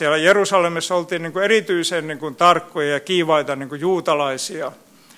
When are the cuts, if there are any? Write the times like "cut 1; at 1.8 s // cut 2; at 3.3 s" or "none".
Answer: none